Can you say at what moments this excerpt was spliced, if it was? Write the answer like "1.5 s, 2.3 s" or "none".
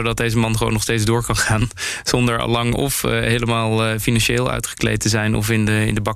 none